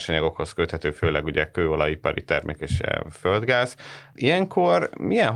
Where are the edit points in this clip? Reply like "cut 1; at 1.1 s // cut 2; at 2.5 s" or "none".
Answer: none